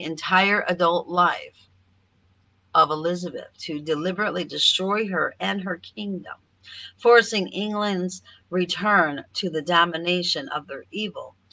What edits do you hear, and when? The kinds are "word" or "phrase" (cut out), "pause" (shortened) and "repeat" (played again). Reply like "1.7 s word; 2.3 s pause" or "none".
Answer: none